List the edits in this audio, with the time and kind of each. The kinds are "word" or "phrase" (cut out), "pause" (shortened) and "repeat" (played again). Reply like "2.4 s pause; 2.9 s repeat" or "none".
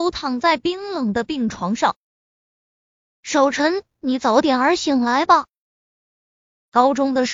none